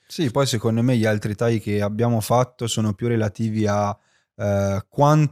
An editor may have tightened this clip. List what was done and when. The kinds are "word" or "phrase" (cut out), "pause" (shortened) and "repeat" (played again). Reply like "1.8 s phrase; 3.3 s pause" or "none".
none